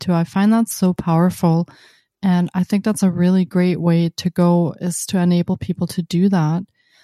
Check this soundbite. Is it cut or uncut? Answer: uncut